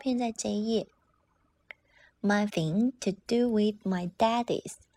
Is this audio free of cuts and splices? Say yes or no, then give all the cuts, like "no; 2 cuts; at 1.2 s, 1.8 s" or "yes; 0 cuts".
no; 1 cut; at 2.5 s